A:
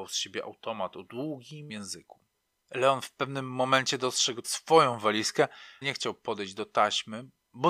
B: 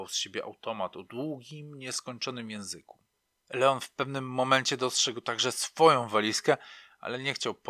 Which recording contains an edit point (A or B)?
A